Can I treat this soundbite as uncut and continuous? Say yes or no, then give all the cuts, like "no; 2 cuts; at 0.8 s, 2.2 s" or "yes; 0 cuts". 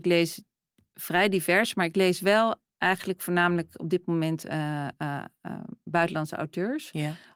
yes; 0 cuts